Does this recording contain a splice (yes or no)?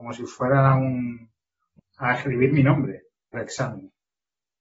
yes